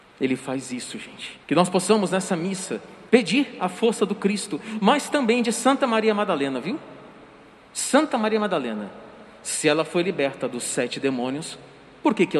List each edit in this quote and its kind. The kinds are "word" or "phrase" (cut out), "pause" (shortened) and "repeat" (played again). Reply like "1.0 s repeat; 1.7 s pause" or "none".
1.4 s pause; 3.1 s pause